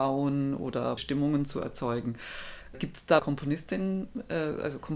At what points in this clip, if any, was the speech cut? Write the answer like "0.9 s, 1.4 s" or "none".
1.0 s, 3.2 s

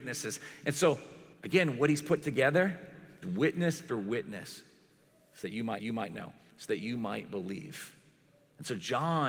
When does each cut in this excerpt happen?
1.3 s, 3.2 s, 3.9 s, 5.8 s

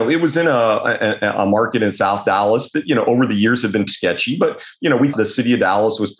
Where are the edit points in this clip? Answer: 3.9 s, 5.1 s

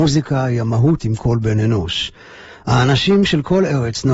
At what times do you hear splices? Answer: 1.0 s

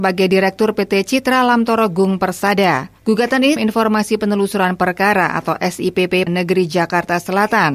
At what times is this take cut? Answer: 3.0 s, 3.6 s, 6.3 s

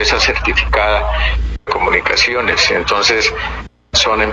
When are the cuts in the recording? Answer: 1.7 s

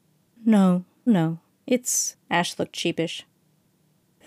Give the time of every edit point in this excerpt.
1.1 s, 2.2 s

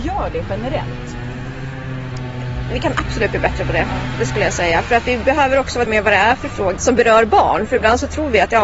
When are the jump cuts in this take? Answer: 5.9 s, 6.8 s

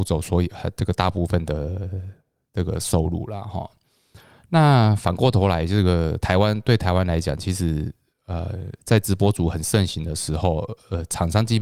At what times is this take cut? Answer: none

